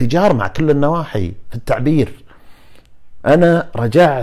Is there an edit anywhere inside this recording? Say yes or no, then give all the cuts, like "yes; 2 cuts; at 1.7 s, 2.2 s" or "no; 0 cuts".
no; 0 cuts